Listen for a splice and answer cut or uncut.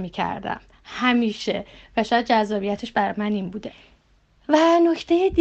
uncut